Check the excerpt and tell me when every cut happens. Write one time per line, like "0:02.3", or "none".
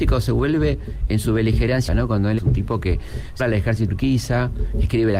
0:01.1
0:01.9
0:02.4
0:03.4
0:03.9